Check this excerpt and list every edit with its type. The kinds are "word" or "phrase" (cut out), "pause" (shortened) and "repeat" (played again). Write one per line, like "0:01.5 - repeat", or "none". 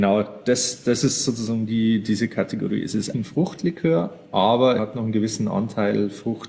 0:03.1 - word
0:04.8 - word